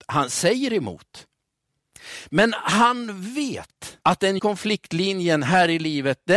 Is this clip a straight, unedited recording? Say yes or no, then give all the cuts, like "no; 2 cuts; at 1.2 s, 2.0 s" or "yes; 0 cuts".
no; 2 cuts; at 4.0 s, 4.4 s